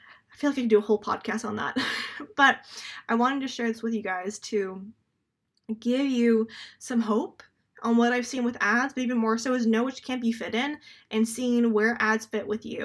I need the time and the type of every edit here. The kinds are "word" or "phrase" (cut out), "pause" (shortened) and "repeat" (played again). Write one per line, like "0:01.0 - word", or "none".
none